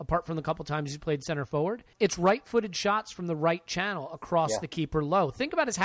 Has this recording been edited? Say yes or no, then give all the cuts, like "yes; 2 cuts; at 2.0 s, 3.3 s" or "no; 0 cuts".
yes; 1 cut; at 1.9 s